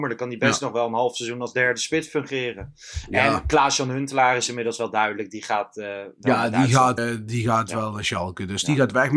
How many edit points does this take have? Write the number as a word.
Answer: one